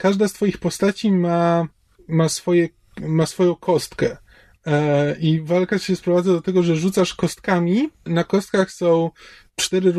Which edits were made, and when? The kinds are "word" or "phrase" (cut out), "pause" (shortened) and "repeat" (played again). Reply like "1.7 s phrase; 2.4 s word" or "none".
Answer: 7.9 s pause